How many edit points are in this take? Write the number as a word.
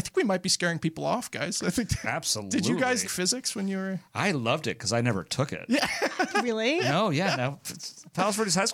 two